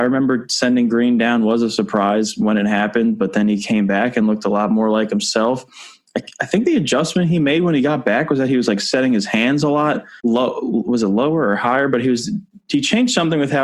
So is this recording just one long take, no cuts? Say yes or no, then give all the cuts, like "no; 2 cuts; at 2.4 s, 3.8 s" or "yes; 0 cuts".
no; 1 cut; at 10.2 s